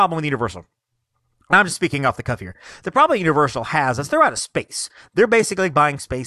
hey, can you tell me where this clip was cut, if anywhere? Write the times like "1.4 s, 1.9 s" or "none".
none